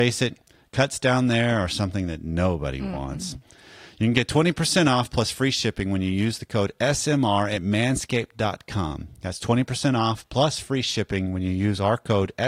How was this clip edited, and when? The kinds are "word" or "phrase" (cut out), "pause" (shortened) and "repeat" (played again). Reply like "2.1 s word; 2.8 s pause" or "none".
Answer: none

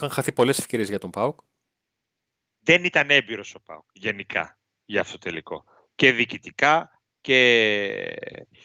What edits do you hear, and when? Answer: none

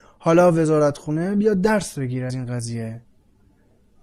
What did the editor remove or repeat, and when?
2.3 s word

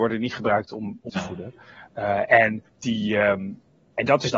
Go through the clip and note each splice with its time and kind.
1.1 s word; 2.7 s pause

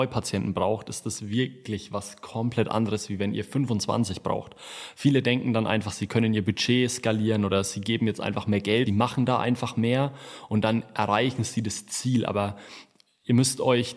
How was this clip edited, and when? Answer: 8.9 s phrase

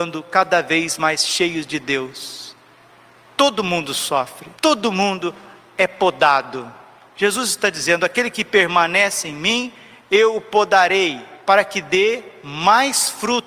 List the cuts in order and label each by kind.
4.6 s pause; 11.4 s pause

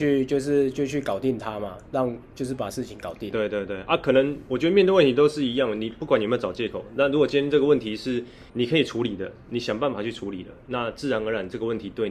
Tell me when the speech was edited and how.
8.5 s pause

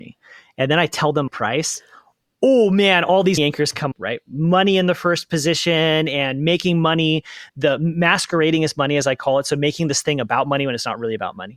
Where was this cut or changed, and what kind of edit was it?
1.3 s word; 3.4 s word; 3.9 s word; 7.5 s word

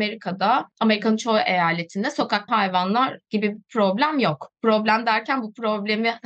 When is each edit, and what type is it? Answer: 2.5 s word

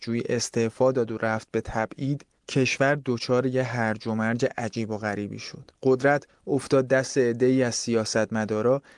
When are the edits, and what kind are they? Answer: 2.4 s pause; 5.8 s pause

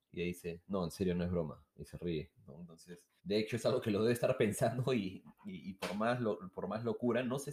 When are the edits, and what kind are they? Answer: 3.2 s pause

